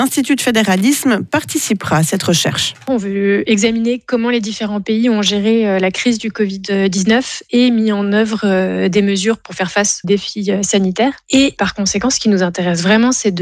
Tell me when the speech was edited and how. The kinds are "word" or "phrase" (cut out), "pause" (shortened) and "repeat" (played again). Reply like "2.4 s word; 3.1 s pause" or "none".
10.0 s word